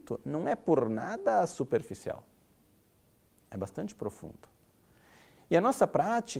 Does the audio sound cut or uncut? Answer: uncut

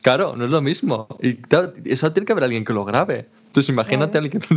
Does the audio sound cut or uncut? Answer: uncut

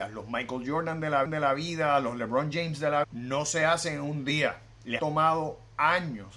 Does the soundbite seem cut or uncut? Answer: cut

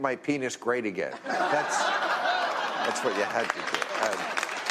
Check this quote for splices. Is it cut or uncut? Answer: uncut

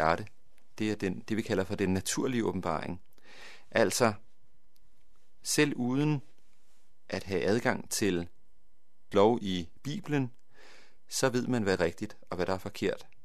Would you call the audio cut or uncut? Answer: cut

